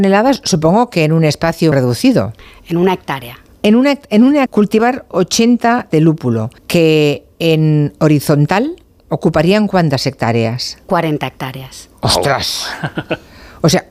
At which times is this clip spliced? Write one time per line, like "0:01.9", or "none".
0:01.7
0:04.5
0:05.9
0:06.6
0:08.8
0:10.8

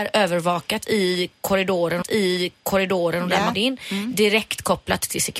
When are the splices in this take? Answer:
0:02.0
0:03.5

